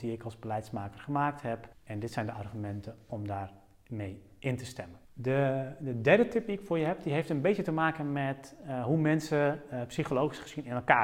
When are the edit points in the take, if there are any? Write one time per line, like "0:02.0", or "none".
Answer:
0:01.7
0:05.0